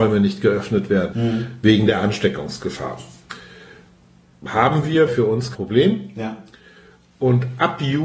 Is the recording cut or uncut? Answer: cut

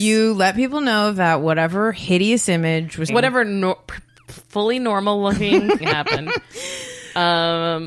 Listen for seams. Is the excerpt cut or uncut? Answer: cut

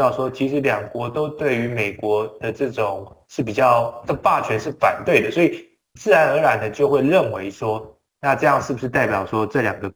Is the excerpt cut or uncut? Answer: uncut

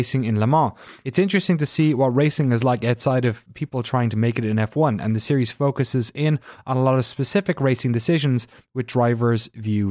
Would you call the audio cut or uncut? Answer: uncut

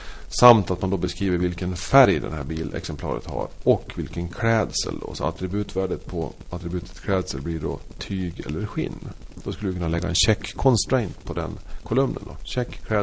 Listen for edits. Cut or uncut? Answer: uncut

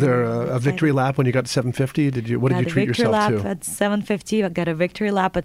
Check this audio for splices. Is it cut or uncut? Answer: uncut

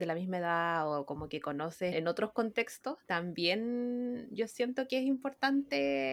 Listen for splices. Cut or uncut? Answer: cut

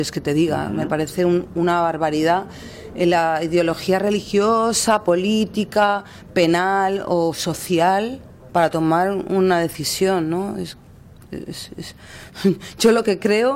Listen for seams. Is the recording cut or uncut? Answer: uncut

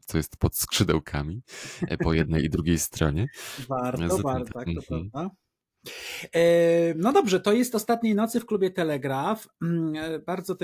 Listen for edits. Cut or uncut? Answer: cut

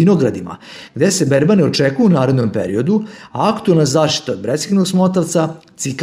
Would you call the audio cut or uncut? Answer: uncut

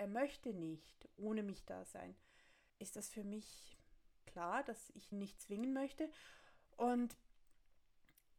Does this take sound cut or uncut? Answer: cut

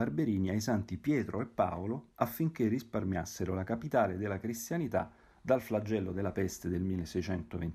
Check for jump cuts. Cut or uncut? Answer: uncut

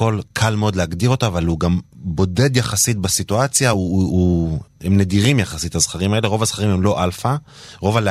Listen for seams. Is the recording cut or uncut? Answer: uncut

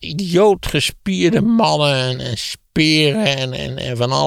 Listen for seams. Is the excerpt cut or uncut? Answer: uncut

